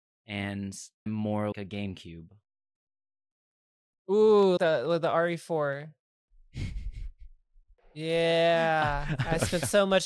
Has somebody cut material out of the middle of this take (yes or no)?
yes